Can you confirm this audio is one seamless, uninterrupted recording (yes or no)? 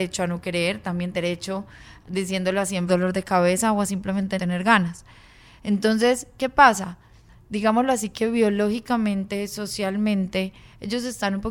no